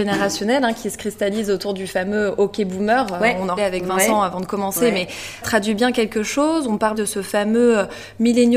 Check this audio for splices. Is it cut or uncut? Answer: cut